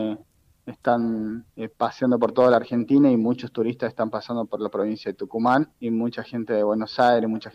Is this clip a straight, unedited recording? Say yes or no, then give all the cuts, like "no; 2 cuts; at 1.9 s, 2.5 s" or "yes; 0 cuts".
no; 2 cuts; at 1.5 s, 5.7 s